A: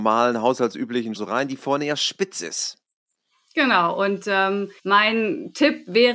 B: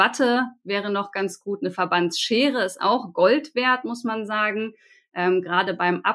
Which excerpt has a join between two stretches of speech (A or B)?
A